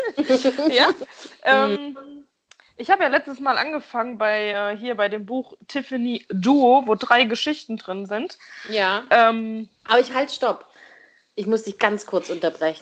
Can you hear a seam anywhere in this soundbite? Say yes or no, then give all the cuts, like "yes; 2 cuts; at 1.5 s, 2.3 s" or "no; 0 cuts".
no; 0 cuts